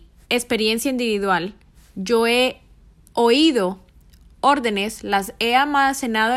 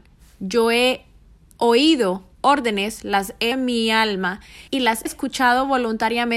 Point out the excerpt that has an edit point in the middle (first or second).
second